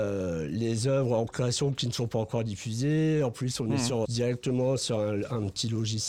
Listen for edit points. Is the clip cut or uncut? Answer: cut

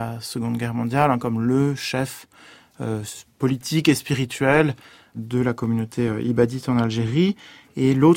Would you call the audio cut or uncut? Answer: uncut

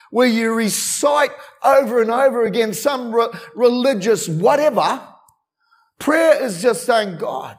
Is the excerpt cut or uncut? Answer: uncut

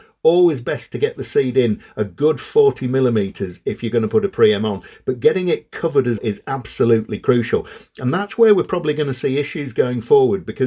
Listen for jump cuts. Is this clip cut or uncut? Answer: cut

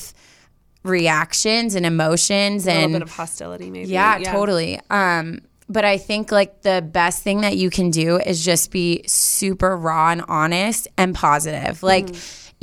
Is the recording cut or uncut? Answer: uncut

